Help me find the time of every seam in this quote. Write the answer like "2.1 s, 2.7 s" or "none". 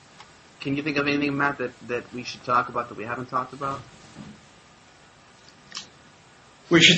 none

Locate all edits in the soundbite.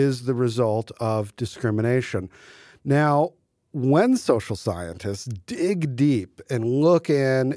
none

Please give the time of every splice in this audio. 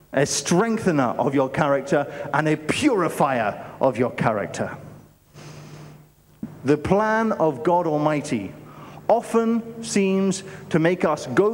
none

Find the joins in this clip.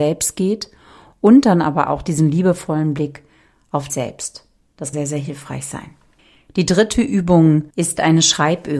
3.9 s, 4.9 s, 6.2 s, 7.7 s

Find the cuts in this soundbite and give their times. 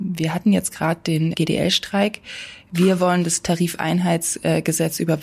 1.3 s

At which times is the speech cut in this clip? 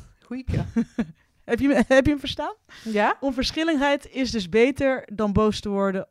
none

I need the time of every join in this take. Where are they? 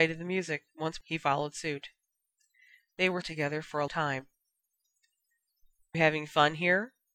1.0 s, 3.2 s, 3.9 s, 5.9 s

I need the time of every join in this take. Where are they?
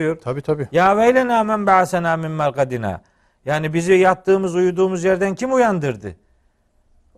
none

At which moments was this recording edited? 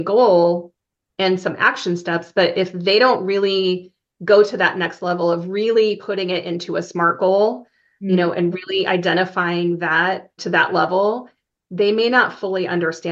10.4 s

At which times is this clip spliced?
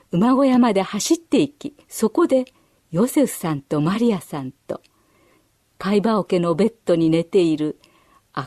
1.8 s

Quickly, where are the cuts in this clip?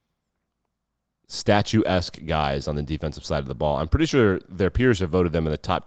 none

